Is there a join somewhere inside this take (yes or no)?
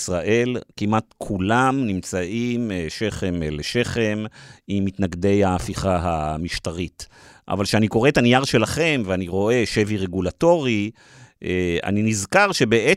no